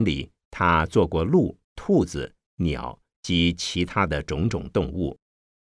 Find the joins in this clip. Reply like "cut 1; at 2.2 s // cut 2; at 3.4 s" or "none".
cut 1; at 1.6 s